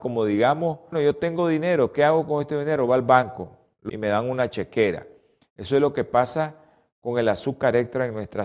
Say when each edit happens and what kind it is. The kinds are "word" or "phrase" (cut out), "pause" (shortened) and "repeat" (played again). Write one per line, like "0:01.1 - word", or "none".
0:00.9 - word
0:03.9 - phrase